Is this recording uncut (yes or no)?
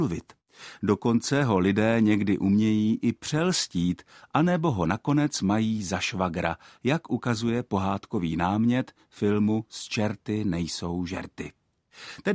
yes